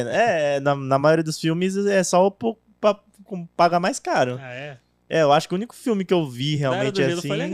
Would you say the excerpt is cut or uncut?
uncut